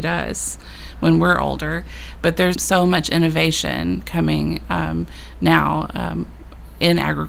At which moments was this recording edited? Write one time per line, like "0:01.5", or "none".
0:02.5